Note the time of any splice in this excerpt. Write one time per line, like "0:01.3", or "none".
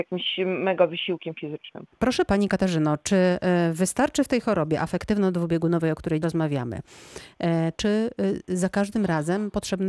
0:02.3
0:06.2
0:07.8